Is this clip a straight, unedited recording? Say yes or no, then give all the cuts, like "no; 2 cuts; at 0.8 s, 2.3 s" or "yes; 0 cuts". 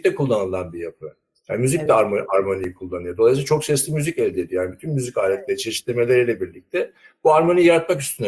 yes; 0 cuts